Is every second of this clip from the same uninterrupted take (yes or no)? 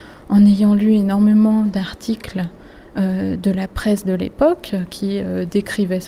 yes